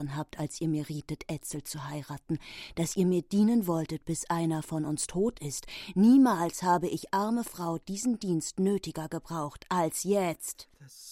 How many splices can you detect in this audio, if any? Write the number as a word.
zero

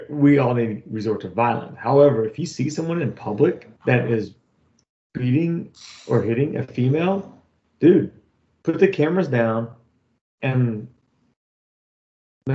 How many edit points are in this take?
one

